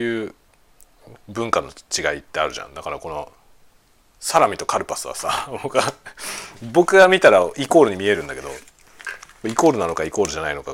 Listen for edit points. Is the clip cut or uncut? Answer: uncut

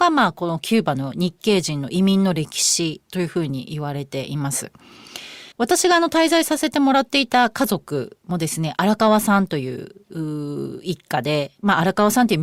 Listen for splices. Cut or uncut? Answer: cut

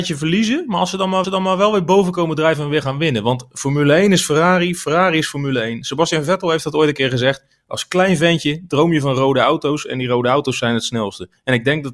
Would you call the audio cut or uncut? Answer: cut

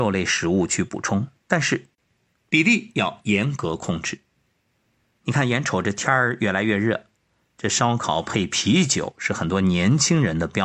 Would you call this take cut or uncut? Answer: uncut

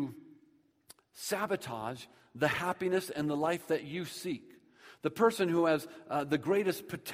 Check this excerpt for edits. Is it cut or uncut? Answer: uncut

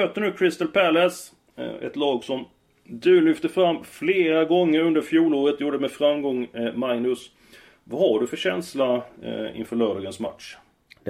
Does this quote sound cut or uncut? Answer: uncut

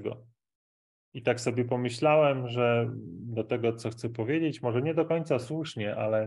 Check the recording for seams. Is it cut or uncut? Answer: uncut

